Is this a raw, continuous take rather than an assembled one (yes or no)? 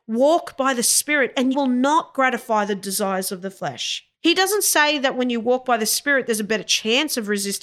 no